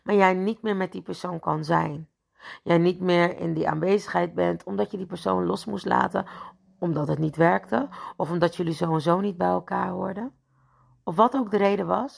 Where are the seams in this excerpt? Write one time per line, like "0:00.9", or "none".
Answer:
none